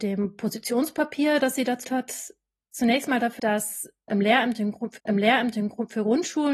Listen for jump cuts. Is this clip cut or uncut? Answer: cut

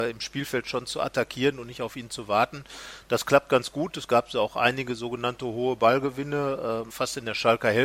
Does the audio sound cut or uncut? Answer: cut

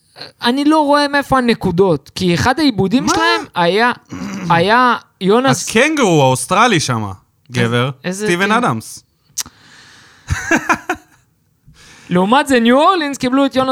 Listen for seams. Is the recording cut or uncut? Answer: uncut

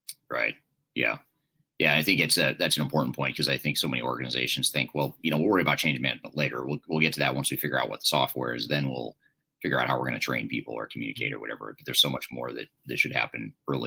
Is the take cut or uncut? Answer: uncut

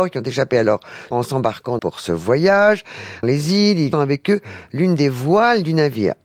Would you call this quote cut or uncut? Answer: cut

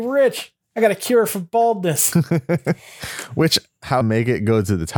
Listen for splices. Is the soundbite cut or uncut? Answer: cut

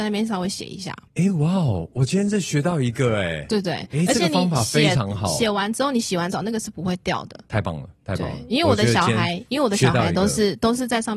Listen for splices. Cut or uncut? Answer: cut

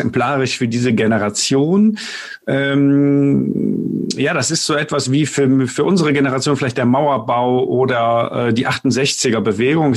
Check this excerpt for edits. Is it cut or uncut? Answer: uncut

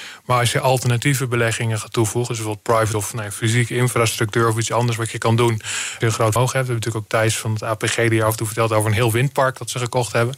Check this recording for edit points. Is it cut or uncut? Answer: cut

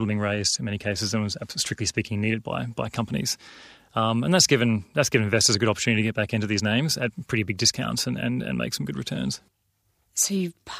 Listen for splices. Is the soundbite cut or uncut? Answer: uncut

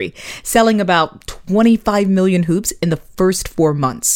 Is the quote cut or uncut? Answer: uncut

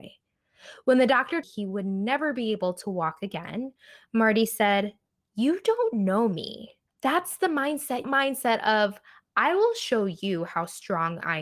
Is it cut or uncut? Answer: cut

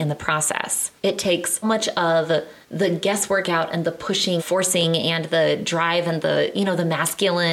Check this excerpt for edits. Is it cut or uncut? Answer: cut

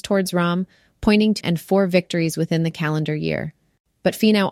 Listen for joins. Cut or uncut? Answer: cut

